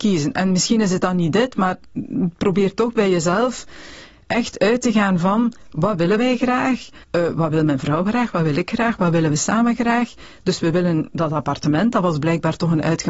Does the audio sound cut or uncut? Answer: cut